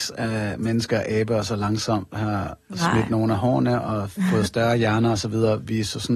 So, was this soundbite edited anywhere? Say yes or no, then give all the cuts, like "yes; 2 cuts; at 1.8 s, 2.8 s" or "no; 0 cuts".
no; 0 cuts